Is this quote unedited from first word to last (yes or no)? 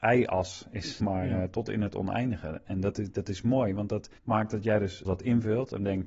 no